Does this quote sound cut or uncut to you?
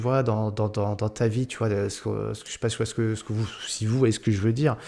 uncut